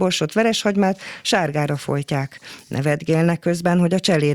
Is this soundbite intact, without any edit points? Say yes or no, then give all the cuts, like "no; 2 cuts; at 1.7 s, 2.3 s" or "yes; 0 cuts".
yes; 0 cuts